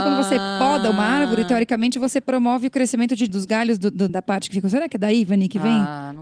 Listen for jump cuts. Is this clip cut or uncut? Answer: cut